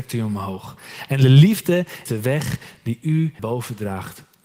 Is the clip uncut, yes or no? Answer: no